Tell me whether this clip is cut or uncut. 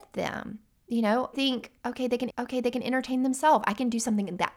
cut